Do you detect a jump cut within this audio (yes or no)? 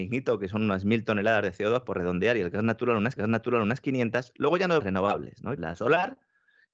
yes